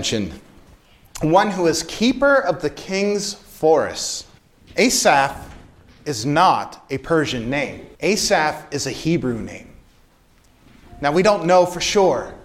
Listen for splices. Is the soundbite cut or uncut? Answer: cut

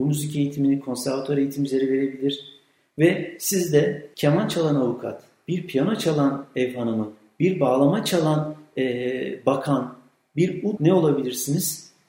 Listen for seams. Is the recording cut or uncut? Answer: cut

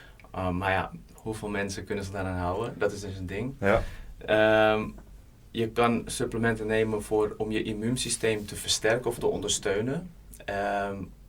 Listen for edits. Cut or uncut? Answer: uncut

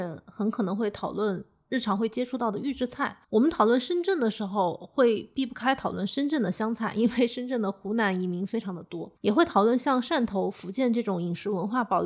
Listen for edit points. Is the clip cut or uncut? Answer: cut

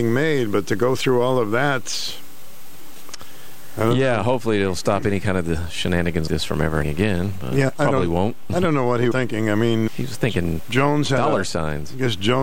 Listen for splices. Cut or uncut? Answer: cut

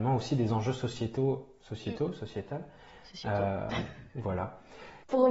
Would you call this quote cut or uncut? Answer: uncut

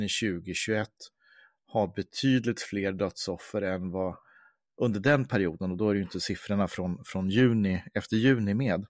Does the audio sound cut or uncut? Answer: uncut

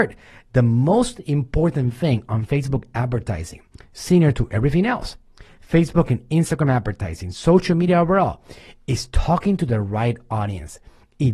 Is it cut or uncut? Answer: uncut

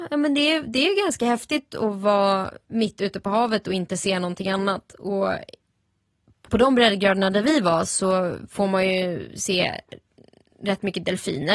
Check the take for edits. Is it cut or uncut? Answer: uncut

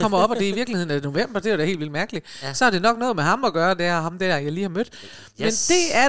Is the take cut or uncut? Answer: uncut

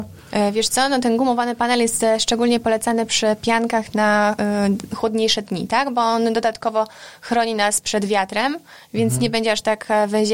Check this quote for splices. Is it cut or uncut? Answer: uncut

